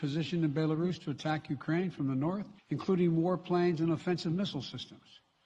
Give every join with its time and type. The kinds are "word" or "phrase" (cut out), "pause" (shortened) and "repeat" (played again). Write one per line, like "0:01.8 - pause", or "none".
0:02.6 - pause